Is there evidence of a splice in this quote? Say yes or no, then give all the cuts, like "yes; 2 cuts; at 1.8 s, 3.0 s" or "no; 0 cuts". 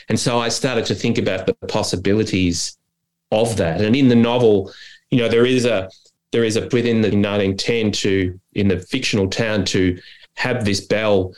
yes; 2 cuts; at 6.7 s, 7.1 s